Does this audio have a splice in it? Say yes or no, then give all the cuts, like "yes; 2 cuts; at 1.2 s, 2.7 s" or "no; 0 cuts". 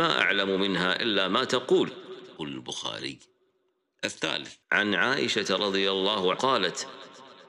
yes; 3 cuts; at 2.4 s, 4.6 s, 6.3 s